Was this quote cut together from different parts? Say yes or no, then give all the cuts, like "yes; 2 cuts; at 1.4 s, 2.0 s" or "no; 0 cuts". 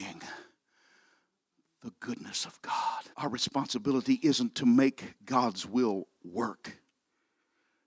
yes; 1 cut; at 3.1 s